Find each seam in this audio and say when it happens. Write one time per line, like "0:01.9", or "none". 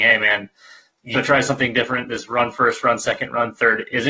0:01.1

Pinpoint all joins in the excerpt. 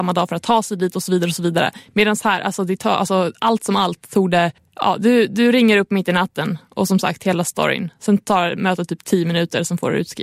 0:04.6

